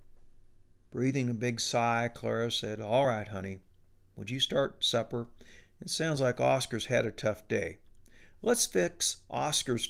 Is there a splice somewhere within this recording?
no; 0 cuts

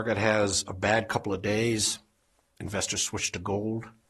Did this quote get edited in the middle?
no; 0 cuts

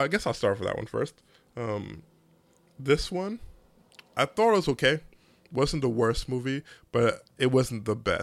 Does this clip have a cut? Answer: no; 0 cuts

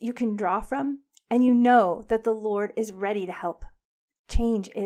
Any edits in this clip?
no; 0 cuts

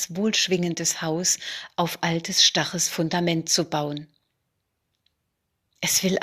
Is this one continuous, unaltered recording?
yes; 0 cuts

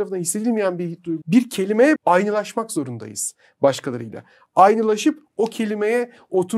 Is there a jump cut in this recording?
yes; 2 cuts; at 1.2 s, 2.0 s

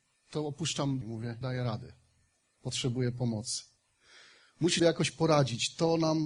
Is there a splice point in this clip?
yes; 3 cuts; at 1.0 s, 1.4 s, 4.8 s

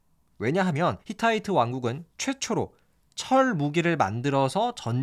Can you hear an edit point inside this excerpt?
yes; 2 cuts; at 1.0 s, 2.1 s

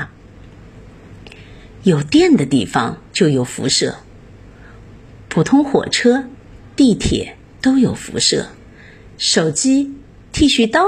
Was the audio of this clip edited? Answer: yes; 1 cut; at 3.1 s

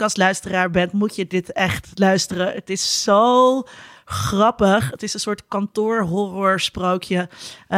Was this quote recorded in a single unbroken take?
yes; 0 cuts

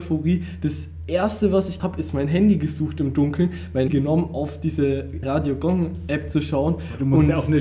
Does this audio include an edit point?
yes; 3 cuts; at 1.8 s, 3.9 s, 5.2 s

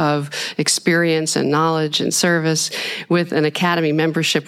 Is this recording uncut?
yes; 0 cuts

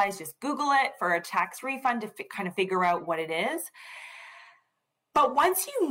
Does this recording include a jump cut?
no; 0 cuts

